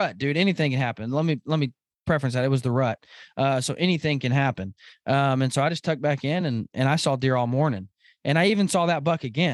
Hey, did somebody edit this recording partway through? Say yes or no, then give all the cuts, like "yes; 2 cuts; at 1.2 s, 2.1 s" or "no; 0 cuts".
no; 0 cuts